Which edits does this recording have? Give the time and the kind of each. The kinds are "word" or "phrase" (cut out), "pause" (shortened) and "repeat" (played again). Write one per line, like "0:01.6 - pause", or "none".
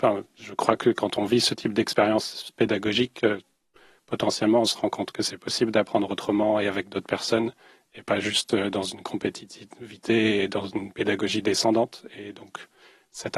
none